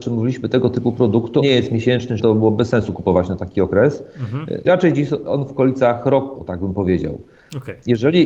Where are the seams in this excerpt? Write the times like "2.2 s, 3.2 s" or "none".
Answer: 1.4 s, 2.2 s, 4.6 s, 6.3 s